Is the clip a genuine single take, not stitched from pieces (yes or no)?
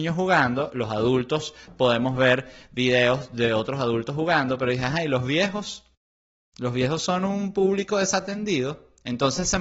yes